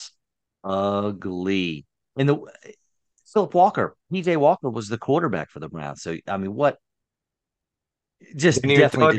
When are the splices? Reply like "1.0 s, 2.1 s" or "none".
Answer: none